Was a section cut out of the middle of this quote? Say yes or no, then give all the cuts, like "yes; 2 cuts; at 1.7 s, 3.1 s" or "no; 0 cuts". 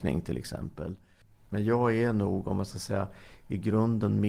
no; 0 cuts